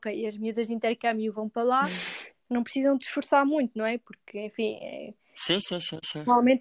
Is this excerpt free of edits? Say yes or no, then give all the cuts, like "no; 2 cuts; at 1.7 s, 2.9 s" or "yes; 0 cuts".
yes; 0 cuts